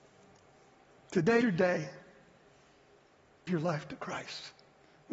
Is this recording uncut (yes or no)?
no